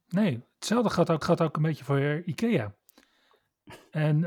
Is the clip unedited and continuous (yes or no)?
no